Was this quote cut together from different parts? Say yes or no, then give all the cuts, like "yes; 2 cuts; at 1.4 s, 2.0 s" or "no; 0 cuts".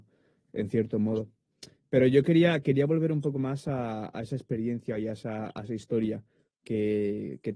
no; 0 cuts